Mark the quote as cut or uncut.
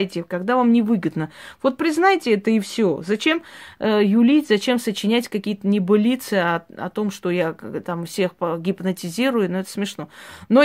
uncut